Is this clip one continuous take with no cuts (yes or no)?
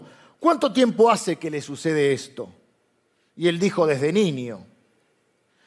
yes